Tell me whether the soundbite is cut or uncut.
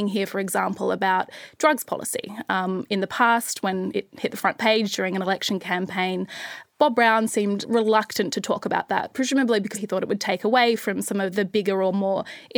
uncut